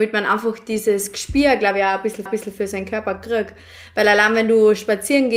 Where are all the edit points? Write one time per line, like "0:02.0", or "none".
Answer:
0:02.3